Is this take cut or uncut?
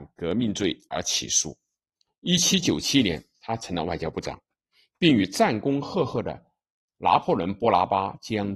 uncut